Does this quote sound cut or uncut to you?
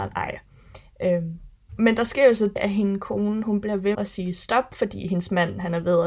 cut